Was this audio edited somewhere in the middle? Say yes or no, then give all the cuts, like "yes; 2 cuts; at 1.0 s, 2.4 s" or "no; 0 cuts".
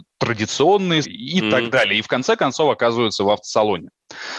yes; 1 cut; at 1.0 s